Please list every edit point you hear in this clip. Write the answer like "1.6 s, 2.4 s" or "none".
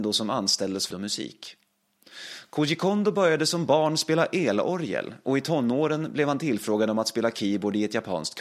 0.9 s